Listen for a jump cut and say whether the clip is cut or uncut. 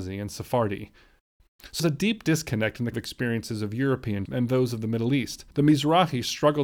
cut